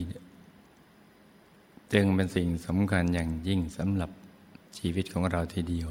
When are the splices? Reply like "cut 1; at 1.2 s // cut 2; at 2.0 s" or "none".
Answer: cut 1; at 4.7 s